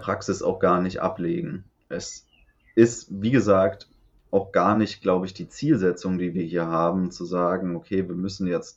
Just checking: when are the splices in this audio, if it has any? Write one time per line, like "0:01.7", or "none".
none